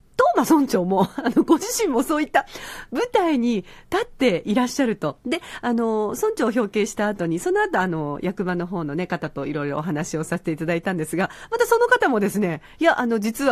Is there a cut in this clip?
no; 0 cuts

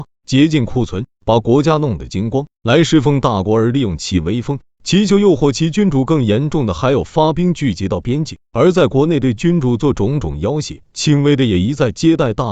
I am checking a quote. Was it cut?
yes; 1 cut; at 10.8 s

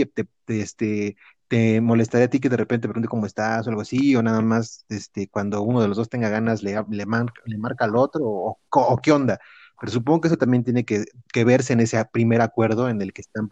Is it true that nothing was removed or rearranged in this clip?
yes; 0 cuts

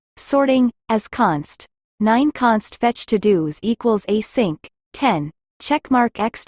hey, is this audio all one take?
yes; 0 cuts

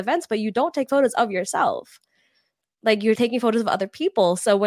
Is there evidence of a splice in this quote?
yes; 1 cut; at 3.2 s

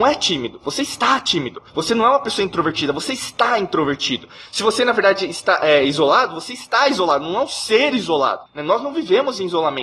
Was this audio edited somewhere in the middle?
yes; 2 cuts; at 1.7 s, 8.5 s

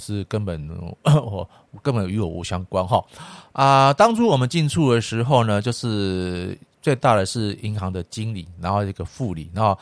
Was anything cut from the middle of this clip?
no; 0 cuts

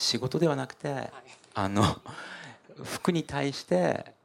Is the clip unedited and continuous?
yes; 0 cuts

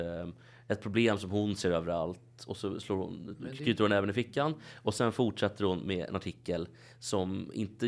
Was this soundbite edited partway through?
no; 0 cuts

